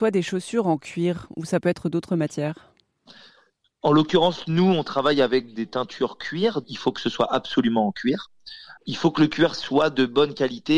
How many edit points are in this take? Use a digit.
2